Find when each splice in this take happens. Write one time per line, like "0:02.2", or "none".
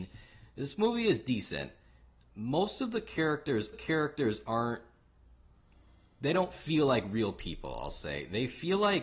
0:03.7